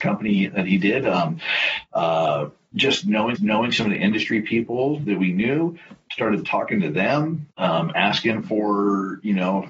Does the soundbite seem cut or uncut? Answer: cut